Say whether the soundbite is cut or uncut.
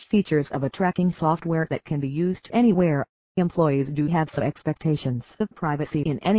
uncut